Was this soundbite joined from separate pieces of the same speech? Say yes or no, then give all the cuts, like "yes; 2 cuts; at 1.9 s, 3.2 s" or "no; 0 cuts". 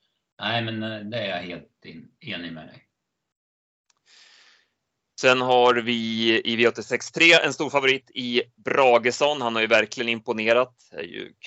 no; 0 cuts